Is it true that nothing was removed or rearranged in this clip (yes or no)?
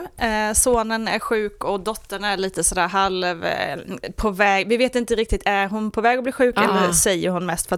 yes